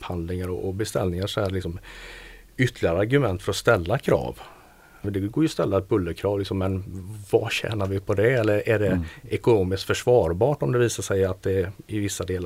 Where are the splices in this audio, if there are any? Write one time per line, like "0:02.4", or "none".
0:05.0